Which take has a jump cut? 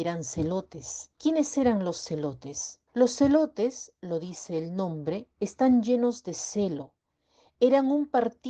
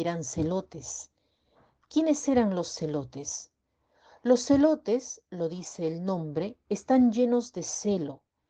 first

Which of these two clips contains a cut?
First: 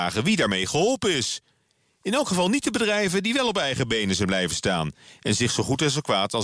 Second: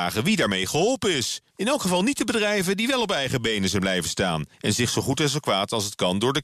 second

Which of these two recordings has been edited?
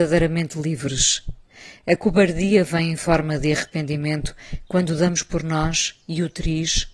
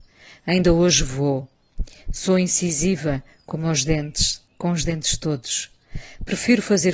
second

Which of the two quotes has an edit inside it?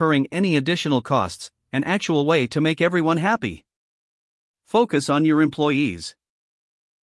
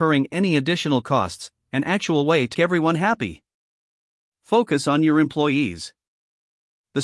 second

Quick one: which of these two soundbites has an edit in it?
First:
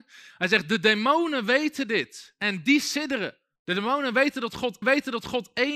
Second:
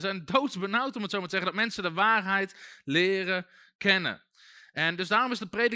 first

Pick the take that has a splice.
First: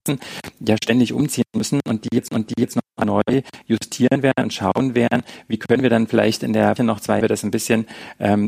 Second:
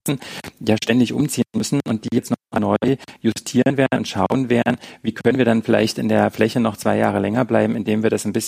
first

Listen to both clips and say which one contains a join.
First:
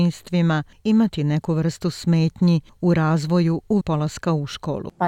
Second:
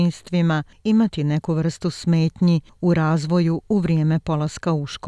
first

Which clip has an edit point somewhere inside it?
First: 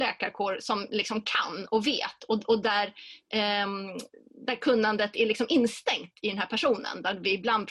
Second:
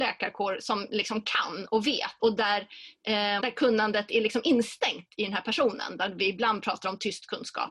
second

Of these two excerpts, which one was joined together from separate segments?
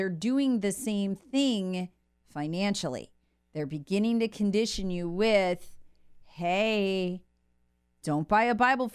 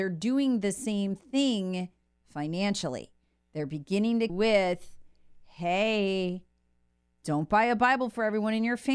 second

